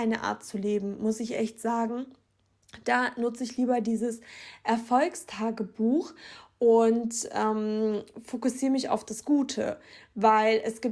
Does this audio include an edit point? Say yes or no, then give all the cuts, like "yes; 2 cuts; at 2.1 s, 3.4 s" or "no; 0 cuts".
no; 0 cuts